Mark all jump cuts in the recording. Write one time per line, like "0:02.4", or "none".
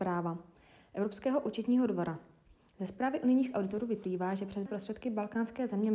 0:04.7

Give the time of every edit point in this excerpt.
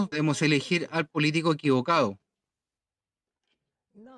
none

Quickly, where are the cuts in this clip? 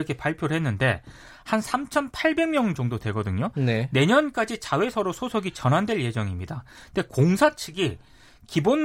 none

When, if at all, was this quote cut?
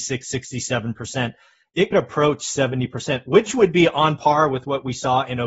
0:01.9

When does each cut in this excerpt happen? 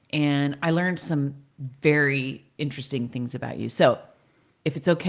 none

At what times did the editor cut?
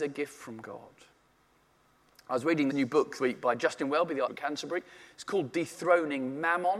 0:02.7
0:03.2
0:04.3

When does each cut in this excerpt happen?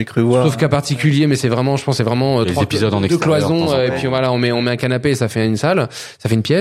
none

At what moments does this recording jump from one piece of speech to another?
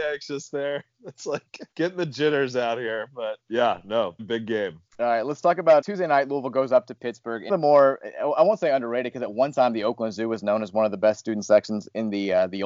0:01.7
0:03.5
0:04.2
0:04.9
0:05.8
0:07.5

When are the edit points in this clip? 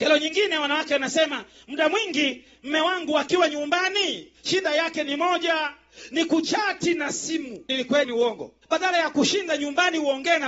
0:07.7
0:08.0

